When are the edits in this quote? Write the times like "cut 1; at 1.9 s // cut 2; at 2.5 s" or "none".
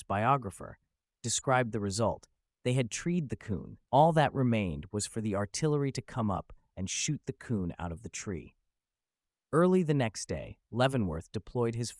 none

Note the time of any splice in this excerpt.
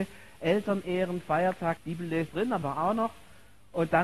cut 1; at 1.8 s // cut 2; at 2.3 s // cut 3; at 2.6 s

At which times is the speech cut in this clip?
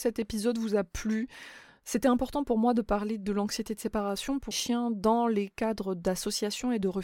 cut 1; at 4.5 s

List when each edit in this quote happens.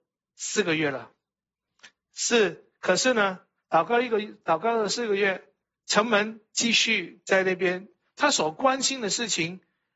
none

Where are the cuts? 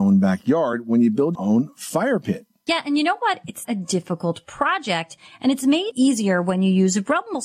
cut 1; at 1.3 s // cut 2; at 3.6 s // cut 3; at 5.9 s

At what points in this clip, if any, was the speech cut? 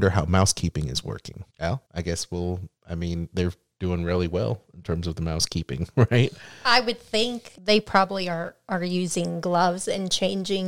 none

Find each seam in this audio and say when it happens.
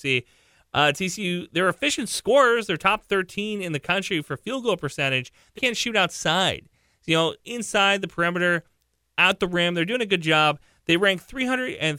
cut 1; at 5.6 s

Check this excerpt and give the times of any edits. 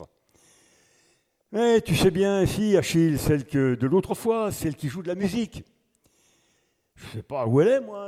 none

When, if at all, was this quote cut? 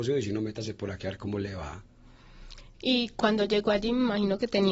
none

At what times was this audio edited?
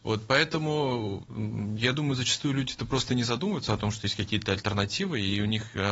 none

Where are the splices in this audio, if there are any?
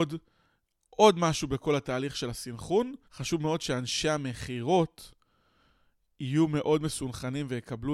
cut 1; at 3.0 s

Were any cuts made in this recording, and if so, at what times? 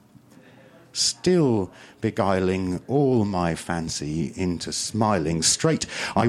none

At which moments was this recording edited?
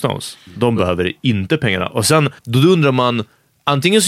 cut 1; at 2.4 s

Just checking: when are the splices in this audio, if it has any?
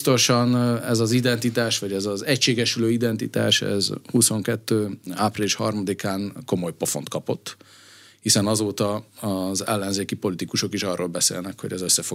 none

